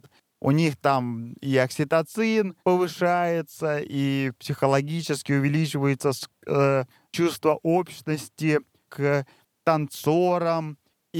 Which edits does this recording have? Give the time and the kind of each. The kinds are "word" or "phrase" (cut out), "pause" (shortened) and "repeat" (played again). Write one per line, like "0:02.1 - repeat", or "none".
0:02.6 - pause
0:08.9 - phrase